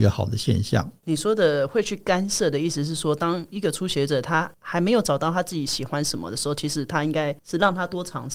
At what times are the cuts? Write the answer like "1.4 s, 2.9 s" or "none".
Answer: 1.0 s

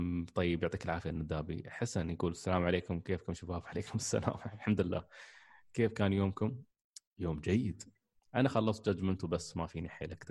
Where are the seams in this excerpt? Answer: none

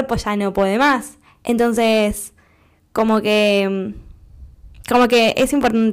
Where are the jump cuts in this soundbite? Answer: none

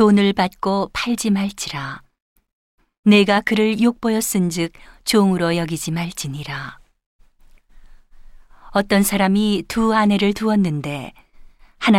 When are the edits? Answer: none

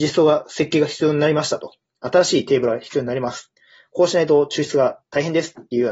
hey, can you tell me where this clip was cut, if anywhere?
none

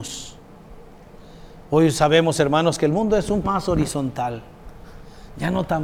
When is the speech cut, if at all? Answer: 3.4 s

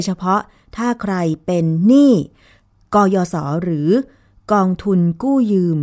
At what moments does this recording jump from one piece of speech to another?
none

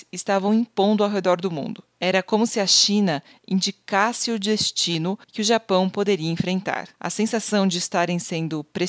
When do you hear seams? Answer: 5.2 s, 6.9 s

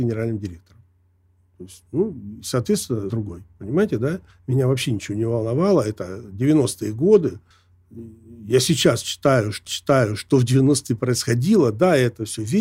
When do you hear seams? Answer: 3.1 s, 4.3 s, 7.5 s, 9.7 s

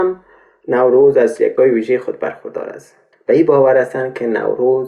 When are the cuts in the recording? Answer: 1.6 s, 3.1 s

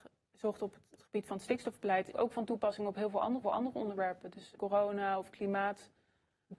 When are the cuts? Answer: 0.9 s, 2.1 s, 3.4 s, 4.5 s

